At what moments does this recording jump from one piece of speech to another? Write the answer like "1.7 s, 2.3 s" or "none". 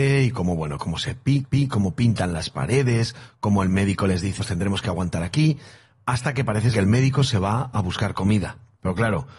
1.4 s, 4.4 s, 6.7 s